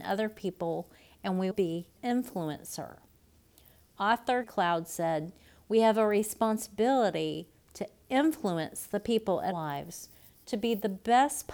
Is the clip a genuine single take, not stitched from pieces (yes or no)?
no